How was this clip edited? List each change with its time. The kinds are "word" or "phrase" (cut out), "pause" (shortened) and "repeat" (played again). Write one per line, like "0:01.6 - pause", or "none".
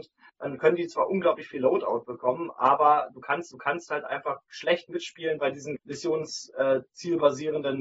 0:03.5 - repeat
0:05.8 - word